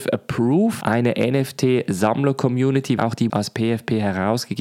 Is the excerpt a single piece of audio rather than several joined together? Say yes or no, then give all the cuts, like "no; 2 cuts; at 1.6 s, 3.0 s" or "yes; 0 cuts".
no; 2 cuts; at 3.0 s, 3.3 s